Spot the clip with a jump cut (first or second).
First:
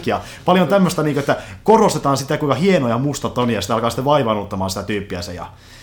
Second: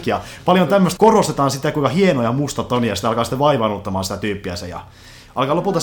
second